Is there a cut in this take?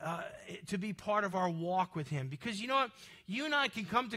no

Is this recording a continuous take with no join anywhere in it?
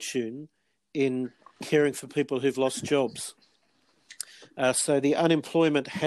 yes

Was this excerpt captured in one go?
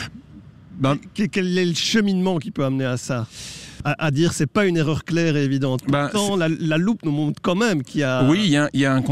yes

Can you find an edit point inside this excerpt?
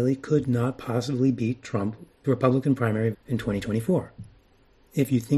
yes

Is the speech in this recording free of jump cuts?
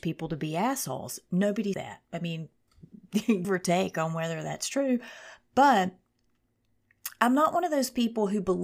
no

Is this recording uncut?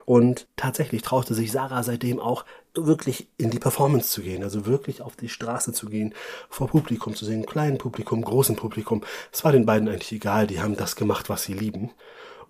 yes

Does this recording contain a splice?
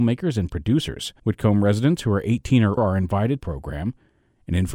yes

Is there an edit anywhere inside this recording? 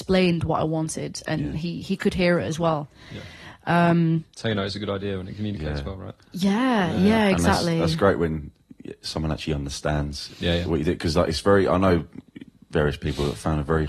no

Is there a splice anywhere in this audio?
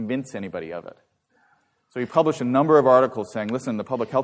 no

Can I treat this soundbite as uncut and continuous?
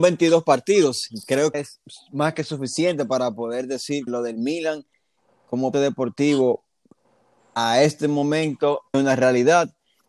no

